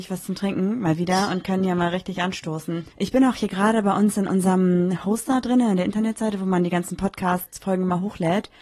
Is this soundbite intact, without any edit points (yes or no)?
no